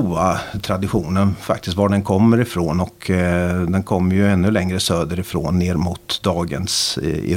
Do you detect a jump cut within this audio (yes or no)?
no